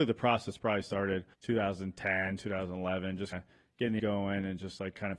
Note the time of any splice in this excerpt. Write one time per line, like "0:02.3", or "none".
0:01.3
0:03.3
0:04.0